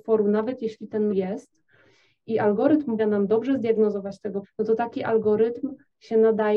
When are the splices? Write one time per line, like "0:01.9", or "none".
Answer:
0:01.1
0:03.0
0:04.4